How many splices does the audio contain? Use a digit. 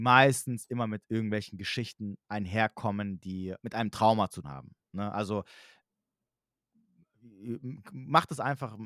3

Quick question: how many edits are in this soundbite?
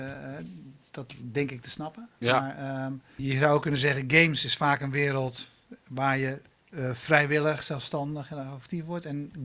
2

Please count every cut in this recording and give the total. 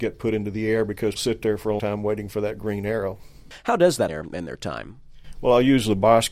3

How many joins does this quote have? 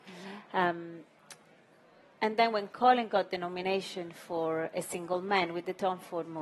0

